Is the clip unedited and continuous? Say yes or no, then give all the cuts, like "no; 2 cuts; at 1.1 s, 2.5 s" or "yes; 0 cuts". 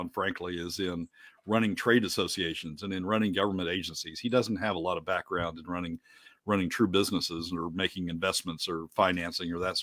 yes; 0 cuts